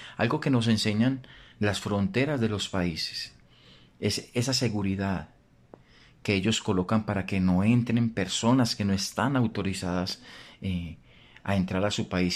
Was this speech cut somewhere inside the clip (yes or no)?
no